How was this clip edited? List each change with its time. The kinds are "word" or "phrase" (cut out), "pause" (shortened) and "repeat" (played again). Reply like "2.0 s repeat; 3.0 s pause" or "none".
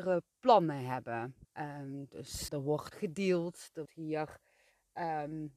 1.4 s pause; 2.5 s word; 2.9 s word; 3.9 s word